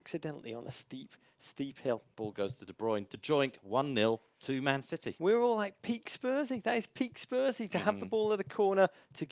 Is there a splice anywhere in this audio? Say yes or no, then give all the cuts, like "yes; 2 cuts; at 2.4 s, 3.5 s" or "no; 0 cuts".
no; 0 cuts